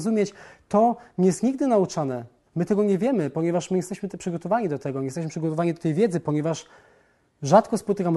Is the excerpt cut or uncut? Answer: uncut